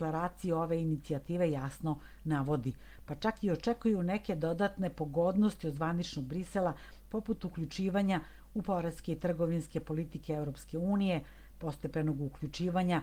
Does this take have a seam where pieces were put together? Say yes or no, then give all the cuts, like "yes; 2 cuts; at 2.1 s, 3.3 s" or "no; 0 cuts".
no; 0 cuts